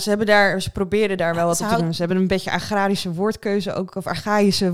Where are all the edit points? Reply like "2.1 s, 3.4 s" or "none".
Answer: none